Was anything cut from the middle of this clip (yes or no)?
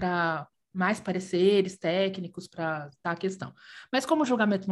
yes